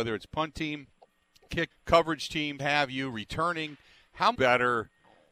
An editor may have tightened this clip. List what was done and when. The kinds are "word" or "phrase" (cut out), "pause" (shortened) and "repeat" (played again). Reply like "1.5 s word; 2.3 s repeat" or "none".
1.7 s word; 2.6 s word; 4.3 s word